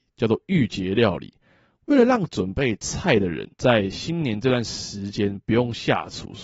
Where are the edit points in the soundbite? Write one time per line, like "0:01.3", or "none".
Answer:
0:03.5